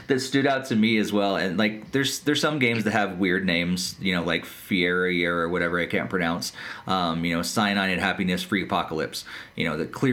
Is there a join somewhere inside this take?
no; 0 cuts

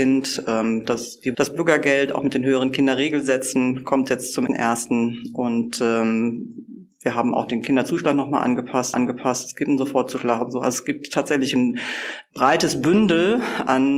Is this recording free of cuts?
no; 3 cuts; at 1.3 s, 4.5 s, 8.9 s

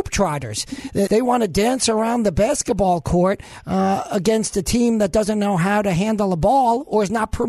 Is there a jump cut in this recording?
yes; 1 cut; at 1.1 s

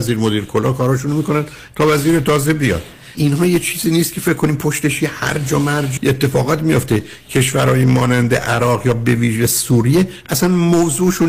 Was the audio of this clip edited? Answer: yes; 2 cuts; at 3.1 s, 6.0 s

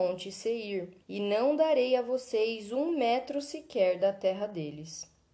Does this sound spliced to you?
yes; 1 cut; at 1.0 s

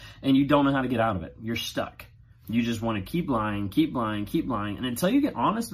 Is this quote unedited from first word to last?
yes; 0 cuts

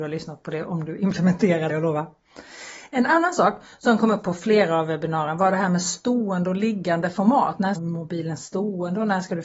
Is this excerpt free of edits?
no; 2 cuts; at 1.7 s, 7.7 s

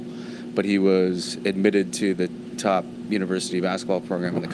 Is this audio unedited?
yes; 0 cuts

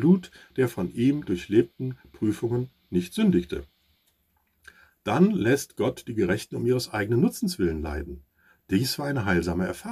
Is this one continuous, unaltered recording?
yes; 0 cuts

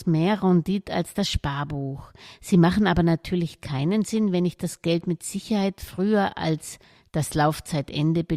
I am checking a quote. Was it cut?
no; 0 cuts

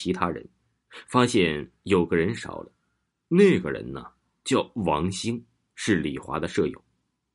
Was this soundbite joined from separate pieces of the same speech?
no; 0 cuts

